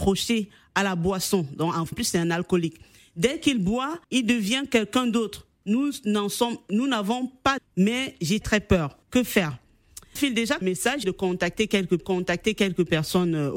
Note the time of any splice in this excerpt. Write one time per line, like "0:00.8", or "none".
0:01.9
0:04.0
0:07.6
0:08.4
0:09.0
0:10.2
0:10.6
0:11.0
0:12.0